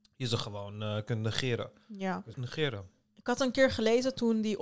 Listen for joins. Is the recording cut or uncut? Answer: cut